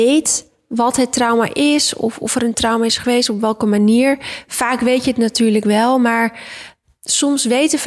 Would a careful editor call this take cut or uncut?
uncut